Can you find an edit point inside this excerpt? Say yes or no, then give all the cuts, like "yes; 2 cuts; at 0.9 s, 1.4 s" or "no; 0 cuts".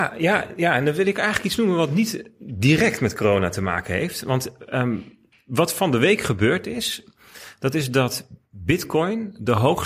no; 0 cuts